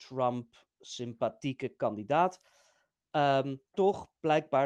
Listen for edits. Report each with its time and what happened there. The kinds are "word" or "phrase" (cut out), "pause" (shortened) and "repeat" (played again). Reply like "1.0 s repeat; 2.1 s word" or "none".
3.7 s word